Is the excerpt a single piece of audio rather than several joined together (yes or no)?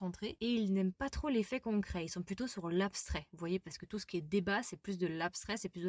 yes